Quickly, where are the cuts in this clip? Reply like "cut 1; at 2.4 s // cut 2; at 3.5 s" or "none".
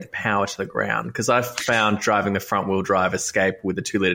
none